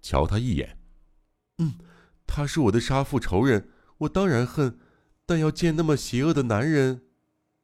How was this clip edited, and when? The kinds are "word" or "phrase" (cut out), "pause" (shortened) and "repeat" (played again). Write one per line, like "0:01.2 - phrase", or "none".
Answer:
none